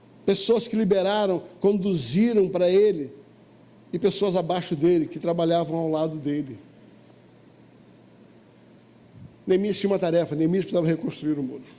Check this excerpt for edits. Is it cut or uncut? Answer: uncut